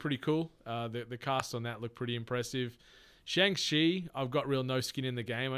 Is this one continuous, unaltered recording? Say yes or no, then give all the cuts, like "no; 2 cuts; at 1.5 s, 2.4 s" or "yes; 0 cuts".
yes; 0 cuts